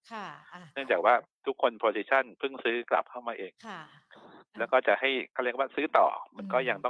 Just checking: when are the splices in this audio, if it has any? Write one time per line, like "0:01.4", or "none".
0:03.6
0:05.3